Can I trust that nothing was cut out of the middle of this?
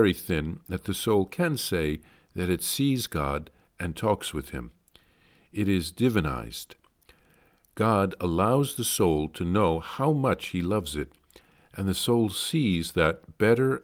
yes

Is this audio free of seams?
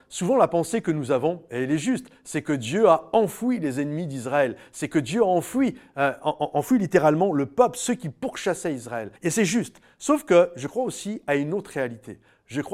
no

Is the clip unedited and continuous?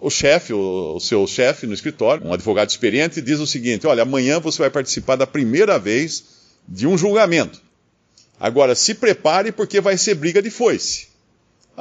no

